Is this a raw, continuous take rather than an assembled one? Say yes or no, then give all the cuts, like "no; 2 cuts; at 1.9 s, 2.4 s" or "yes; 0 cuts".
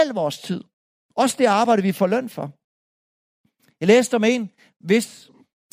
yes; 0 cuts